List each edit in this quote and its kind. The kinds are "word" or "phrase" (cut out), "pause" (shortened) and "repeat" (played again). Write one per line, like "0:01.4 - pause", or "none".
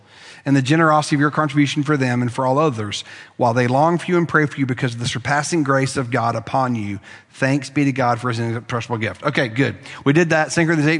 none